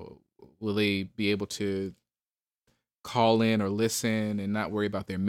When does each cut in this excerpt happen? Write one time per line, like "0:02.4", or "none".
none

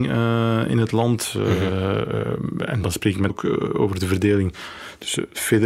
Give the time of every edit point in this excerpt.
0:02.8
0:03.3

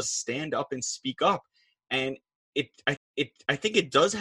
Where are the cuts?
0:03.0

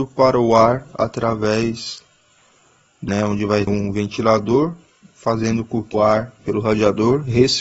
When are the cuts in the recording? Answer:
0:03.1
0:03.7
0:05.9
0:06.4

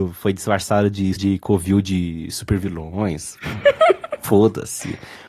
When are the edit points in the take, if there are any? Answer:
0:01.2

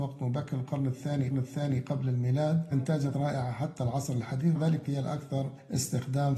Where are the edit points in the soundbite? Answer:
0:01.3
0:02.7
0:03.1
0:04.5
0:04.8

